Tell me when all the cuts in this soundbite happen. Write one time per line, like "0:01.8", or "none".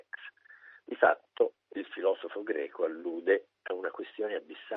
0:01.6